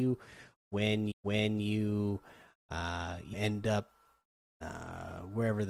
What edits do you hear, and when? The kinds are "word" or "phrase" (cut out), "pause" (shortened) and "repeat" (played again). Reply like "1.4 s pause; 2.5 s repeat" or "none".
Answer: 1.1 s repeat; 3.3 s word